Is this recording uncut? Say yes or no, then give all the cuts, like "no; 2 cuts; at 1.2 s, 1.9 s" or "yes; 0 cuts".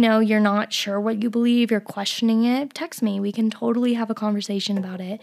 yes; 0 cuts